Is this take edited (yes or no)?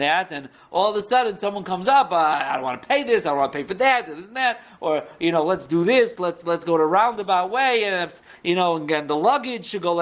no